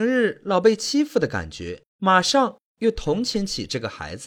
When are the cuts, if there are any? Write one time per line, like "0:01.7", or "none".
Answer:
0:01.9